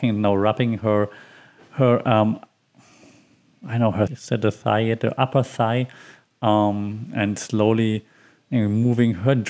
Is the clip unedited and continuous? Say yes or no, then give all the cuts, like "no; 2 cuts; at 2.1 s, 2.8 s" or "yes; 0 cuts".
no; 1 cut; at 4.1 s